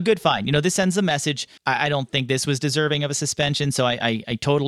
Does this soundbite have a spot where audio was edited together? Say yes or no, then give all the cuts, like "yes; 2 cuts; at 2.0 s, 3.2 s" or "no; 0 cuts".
yes; 1 cut; at 1.6 s